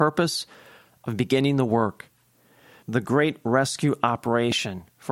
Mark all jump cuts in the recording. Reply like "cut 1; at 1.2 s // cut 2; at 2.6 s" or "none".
cut 1; at 2.8 s